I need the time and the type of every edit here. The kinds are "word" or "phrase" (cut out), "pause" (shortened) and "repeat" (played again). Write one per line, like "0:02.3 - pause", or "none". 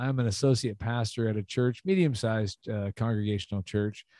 none